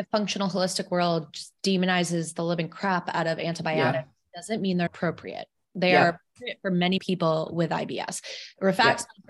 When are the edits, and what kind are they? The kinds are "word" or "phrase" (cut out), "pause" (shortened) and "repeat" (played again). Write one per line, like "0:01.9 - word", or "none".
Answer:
0:04.9 - word
0:07.0 - word